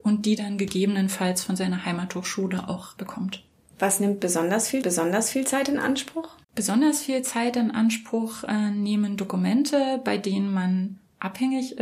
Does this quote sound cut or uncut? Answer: cut